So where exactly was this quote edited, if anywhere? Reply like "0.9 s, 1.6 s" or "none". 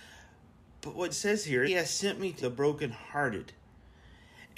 1.1 s, 1.7 s, 2.4 s

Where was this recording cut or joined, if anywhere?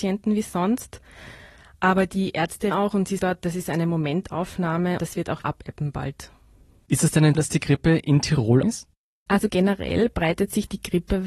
2.7 s, 3.2 s, 5.0 s, 5.4 s, 7.3 s, 8.6 s, 9.5 s

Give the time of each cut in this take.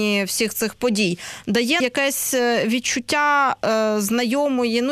1.8 s

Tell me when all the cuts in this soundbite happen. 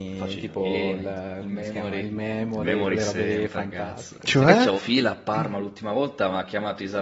4.7 s

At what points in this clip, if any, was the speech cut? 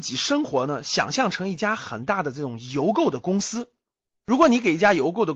none

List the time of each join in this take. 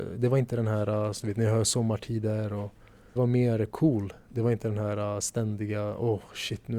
3.2 s

